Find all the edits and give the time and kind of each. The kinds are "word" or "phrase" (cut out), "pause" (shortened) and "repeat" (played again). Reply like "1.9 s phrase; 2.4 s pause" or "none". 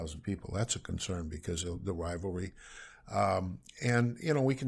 none